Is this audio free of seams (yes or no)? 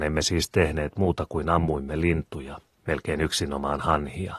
no